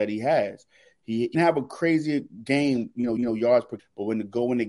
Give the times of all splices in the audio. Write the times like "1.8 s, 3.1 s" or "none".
1.3 s, 3.2 s, 3.8 s